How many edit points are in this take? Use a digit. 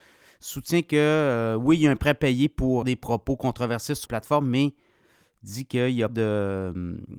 3